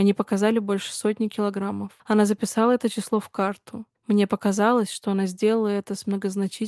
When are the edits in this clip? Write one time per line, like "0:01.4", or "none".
0:02.0
0:03.9